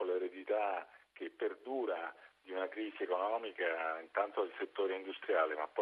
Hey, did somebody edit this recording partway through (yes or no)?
no